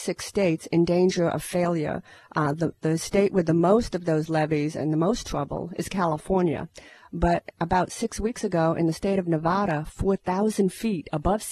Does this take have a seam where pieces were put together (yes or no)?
no